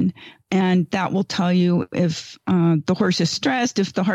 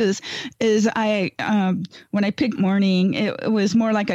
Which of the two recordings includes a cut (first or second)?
second